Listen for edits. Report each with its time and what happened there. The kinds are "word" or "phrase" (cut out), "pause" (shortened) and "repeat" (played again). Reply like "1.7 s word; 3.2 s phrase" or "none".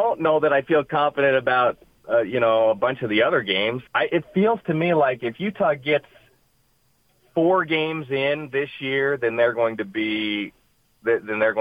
3.9 s pause